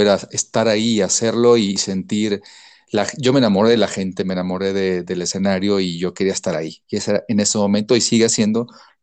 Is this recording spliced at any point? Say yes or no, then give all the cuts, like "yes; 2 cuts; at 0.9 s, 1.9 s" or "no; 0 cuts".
no; 0 cuts